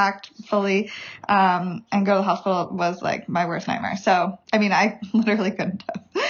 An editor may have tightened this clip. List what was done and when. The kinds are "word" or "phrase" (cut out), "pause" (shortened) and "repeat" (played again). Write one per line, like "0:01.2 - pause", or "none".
0:04.4 - pause